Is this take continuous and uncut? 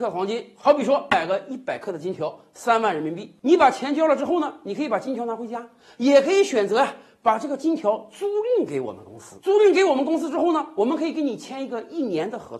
yes; 0 cuts

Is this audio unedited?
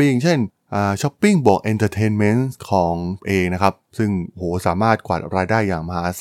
no; 1 cut; at 3.2 s

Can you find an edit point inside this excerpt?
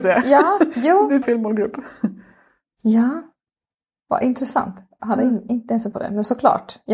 yes; 2 cuts; at 1.2 s, 5.9 s

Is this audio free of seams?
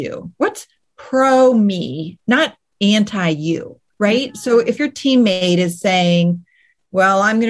no; 2 cuts; at 3.9 s, 4.8 s

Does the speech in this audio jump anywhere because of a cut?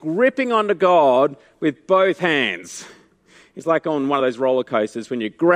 no; 0 cuts

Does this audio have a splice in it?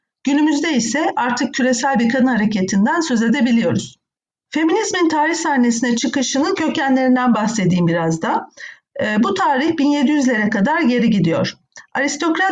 no; 0 cuts

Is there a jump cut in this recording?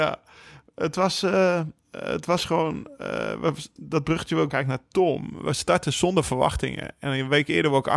yes; 3 cuts; at 1.8 s, 3.8 s, 4.5 s

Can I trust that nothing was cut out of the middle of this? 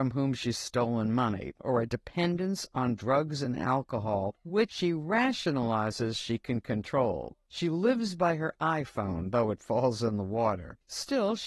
yes; 0 cuts

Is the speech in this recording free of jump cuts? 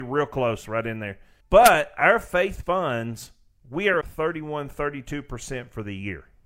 no; 3 cuts; at 1.4 s, 2.6 s, 4.0 s

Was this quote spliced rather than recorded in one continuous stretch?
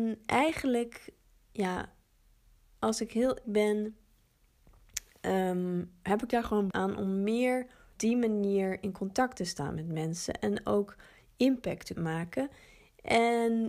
yes; 4 cuts; at 3.4 s, 6.7 s, 7.9 s, 11.9 s

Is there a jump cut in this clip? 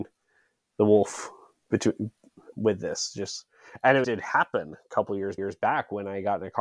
yes; 3 cuts; at 2.5 s, 4.0 s, 5.4 s

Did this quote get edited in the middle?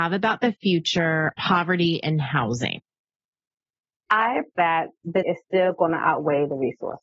yes; 3 cuts; at 1.4 s, 4.5 s, 5.2 s

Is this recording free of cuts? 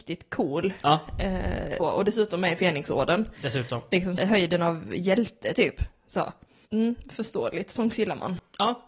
no; 3 cuts; at 1.8 s, 4.2 s, 6.6 s

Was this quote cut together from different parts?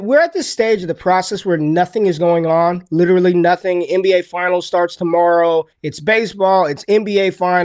yes; 1 cut; at 5.7 s

